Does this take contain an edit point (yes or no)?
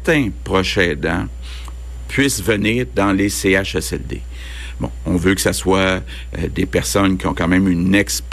no